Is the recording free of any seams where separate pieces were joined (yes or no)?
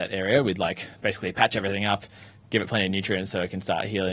yes